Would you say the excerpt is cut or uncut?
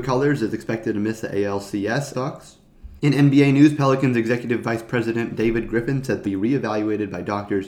cut